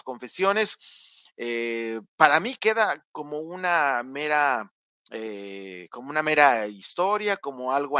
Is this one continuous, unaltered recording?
no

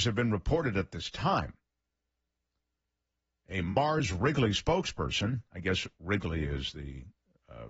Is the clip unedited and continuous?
yes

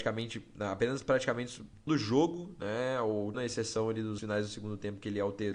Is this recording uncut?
no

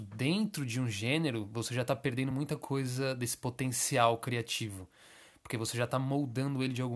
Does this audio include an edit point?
no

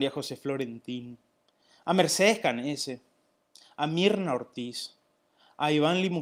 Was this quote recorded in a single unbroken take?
yes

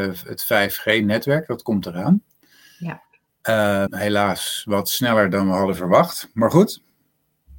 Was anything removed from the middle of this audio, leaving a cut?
yes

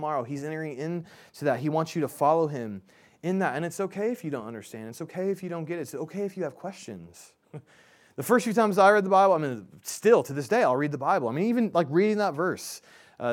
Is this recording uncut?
yes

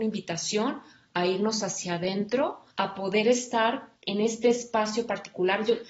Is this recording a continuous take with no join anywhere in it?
no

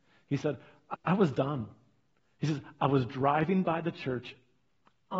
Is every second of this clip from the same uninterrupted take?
no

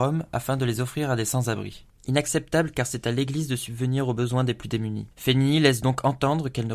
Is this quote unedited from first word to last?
yes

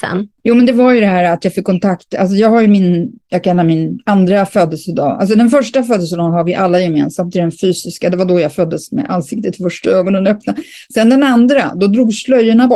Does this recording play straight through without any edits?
yes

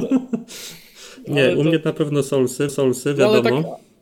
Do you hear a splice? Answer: yes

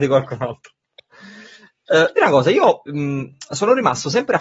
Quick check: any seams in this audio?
yes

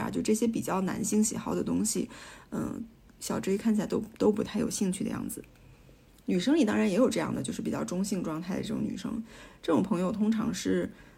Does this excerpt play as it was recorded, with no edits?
yes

